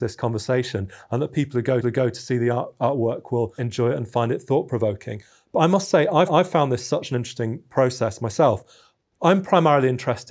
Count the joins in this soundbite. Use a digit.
3